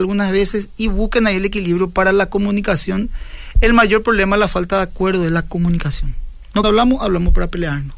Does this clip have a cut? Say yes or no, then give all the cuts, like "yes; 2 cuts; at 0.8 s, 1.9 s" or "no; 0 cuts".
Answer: yes; 1 cut; at 6.6 s